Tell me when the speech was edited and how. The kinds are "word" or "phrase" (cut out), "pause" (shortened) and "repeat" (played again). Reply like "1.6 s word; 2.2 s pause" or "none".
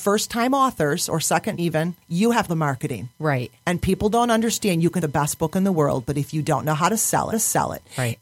1.6 s word; 2.0 s pause; 2.5 s phrase; 5.0 s word; 7.3 s repeat